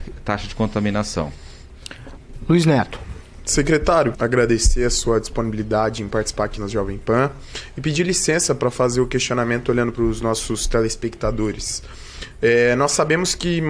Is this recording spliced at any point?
yes; 3 cuts; at 4.1 s, 6.6 s, 9.9 s

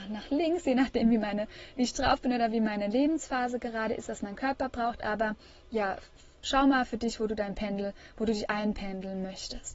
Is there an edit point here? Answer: no; 0 cuts

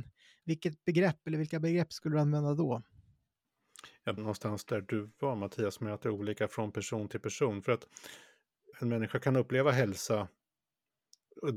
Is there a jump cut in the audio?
yes; 2 cuts; at 4.2 s, 8.7 s

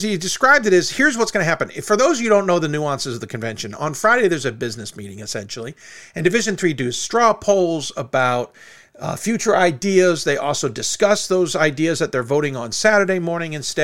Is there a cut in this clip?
no; 0 cuts

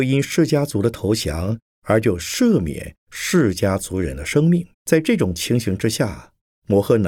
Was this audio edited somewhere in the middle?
yes; 1 cut; at 4.7 s

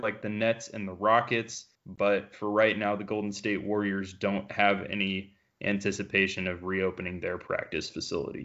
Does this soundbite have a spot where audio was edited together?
yes; 1 cut; at 1.7 s

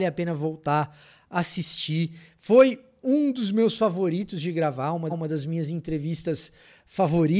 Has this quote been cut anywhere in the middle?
yes; 1 cut; at 5.1 s

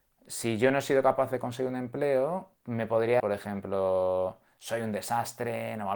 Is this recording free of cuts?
no; 2 cuts; at 2.6 s, 3.2 s

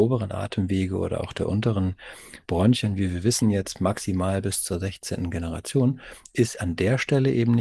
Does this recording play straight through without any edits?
yes; 0 cuts

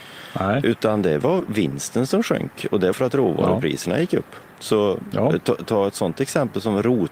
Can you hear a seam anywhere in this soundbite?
yes; 2 cuts; at 2.9 s, 4.5 s

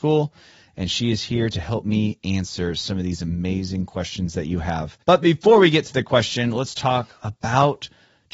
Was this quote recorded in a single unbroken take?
no; 1 cut; at 5.0 s

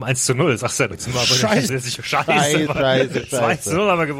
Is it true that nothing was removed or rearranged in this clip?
no; 3 cuts; at 0.9 s, 1.7 s, 2.7 s

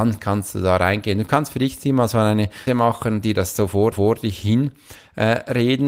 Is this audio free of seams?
no; 2 cuts; at 2.7 s, 3.9 s

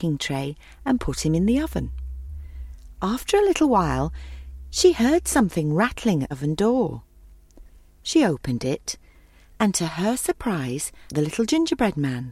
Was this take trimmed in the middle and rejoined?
yes; 2 cuts; at 6.3 s, 11.1 s

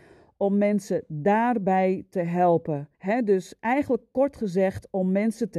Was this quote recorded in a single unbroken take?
no; 1 cut; at 2.9 s

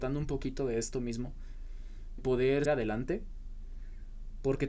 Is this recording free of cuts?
no; 2 cuts; at 2.2 s, 2.7 s

